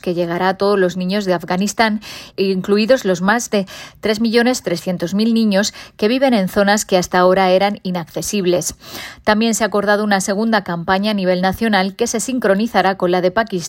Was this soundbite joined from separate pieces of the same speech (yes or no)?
no